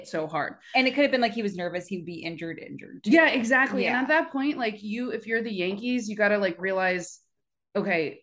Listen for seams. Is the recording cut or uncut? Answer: uncut